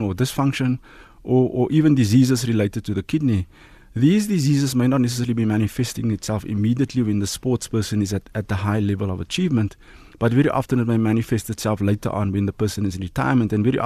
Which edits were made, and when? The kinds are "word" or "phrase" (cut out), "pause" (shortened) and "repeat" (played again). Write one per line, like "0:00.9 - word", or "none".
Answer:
none